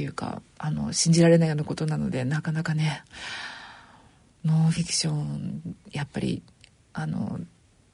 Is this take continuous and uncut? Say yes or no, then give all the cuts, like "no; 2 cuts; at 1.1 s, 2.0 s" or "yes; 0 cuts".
yes; 0 cuts